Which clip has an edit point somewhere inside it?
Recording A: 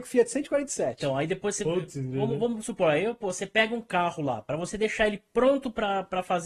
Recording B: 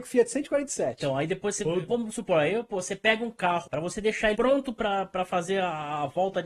B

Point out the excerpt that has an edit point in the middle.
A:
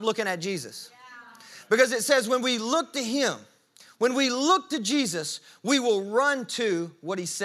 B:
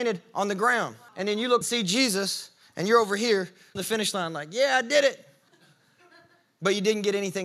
B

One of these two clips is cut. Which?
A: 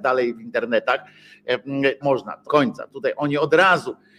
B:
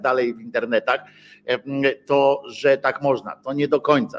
A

